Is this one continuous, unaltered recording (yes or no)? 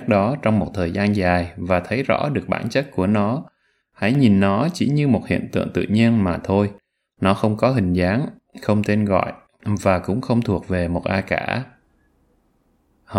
yes